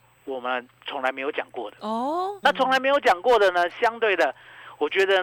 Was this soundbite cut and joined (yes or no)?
yes